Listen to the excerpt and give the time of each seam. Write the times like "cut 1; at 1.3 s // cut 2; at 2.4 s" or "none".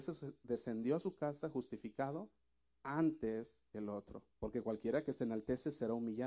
cut 1; at 4.3 s